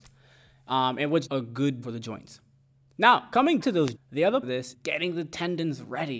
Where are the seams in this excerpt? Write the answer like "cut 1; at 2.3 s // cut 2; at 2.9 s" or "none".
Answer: cut 1; at 1.3 s // cut 2; at 1.8 s // cut 3; at 3.6 s // cut 4; at 4.0 s // cut 5; at 4.4 s // cut 6; at 4.7 s

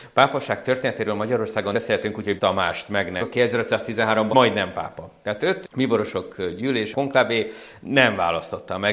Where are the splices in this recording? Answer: cut 1; at 1.7 s // cut 2; at 2.4 s // cut 3; at 3.2 s // cut 4; at 4.3 s // cut 5; at 5.6 s // cut 6; at 6.9 s

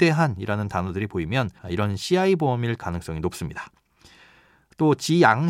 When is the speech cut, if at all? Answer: cut 1; at 1.6 s

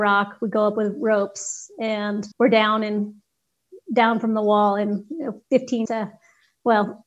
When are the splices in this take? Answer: cut 1; at 2.3 s // cut 2; at 5.9 s

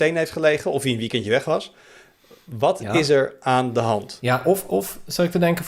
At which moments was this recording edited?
none

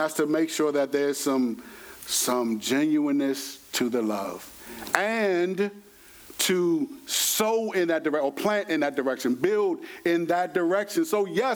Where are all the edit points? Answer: none

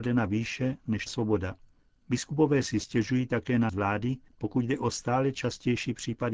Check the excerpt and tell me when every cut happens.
cut 1; at 1.1 s // cut 2; at 3.7 s

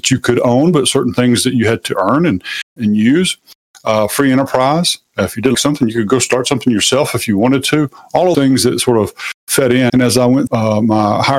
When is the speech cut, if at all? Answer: cut 1; at 2.8 s // cut 2; at 5.5 s // cut 3; at 8.3 s // cut 4; at 9.9 s // cut 5; at 10.5 s

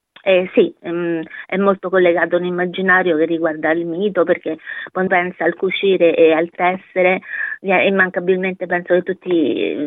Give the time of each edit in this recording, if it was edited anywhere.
cut 1; at 5.1 s

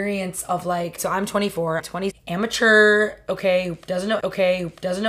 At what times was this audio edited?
cut 1; at 1.0 s // cut 2; at 1.8 s // cut 3; at 2.1 s // cut 4; at 4.2 s

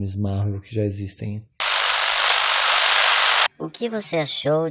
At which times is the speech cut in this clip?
cut 1; at 3.5 s

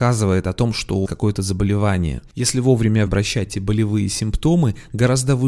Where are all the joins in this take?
cut 1; at 1.1 s // cut 2; at 3.1 s // cut 3; at 3.5 s

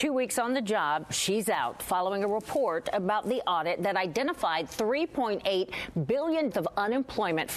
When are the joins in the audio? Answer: cut 1; at 6.5 s

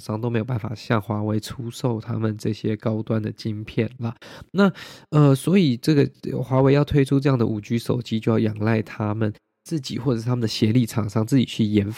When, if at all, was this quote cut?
none

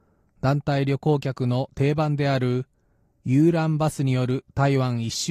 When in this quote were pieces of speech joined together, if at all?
none

